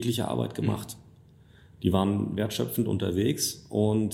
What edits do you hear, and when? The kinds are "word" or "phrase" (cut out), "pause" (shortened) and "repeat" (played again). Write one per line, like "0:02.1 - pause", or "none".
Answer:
none